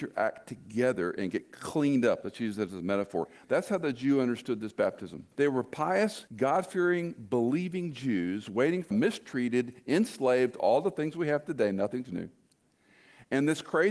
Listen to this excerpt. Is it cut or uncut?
cut